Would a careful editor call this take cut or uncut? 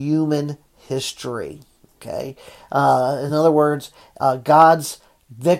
uncut